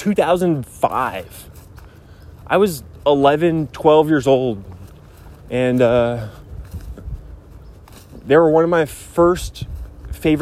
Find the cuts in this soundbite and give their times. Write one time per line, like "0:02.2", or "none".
0:05.4